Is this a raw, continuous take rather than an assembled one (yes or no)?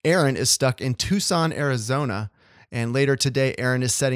yes